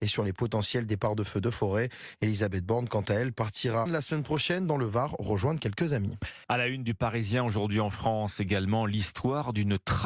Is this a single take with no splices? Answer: no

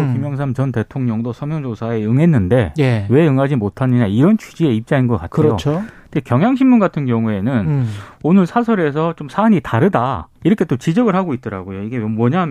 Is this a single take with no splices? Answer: no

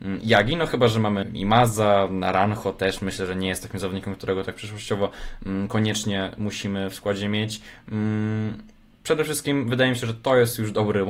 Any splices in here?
yes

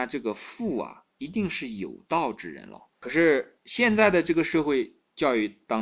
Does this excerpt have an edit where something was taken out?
yes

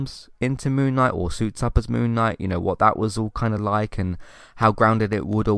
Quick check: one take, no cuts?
yes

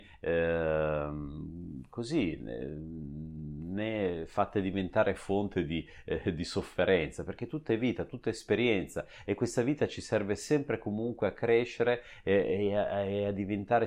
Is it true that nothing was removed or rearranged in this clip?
yes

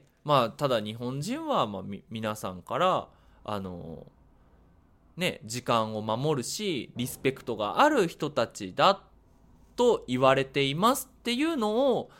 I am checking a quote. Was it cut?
no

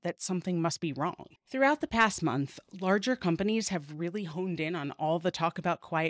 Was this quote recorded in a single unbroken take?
no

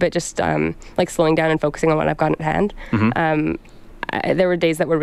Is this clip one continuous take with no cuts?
yes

